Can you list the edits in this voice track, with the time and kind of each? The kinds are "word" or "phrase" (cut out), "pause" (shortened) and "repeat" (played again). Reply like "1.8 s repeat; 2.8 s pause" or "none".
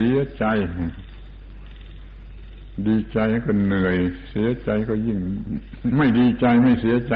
5.9 s phrase